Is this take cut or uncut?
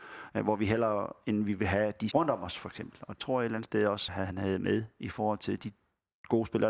cut